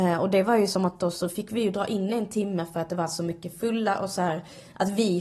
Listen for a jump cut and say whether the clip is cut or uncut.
uncut